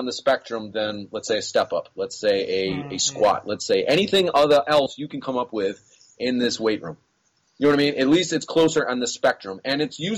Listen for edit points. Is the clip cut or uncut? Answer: uncut